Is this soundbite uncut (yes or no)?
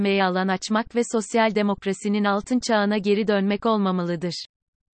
yes